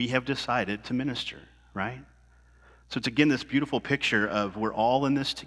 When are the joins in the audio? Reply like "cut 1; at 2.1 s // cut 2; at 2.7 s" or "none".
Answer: none